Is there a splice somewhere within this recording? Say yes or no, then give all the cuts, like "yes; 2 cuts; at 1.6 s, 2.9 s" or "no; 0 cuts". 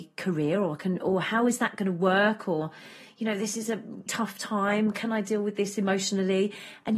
yes; 1 cut; at 4.1 s